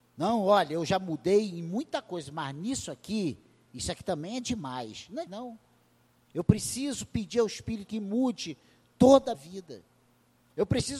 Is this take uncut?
no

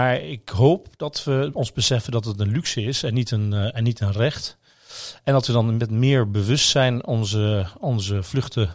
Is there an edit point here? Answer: no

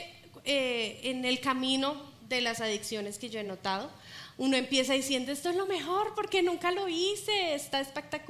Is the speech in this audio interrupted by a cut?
no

